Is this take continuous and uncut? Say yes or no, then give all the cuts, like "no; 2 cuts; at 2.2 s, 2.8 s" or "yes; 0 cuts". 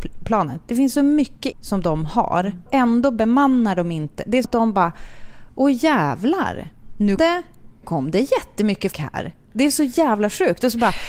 no; 6 cuts; at 1.5 s, 2.7 s, 4.4 s, 7.2 s, 7.8 s, 8.9 s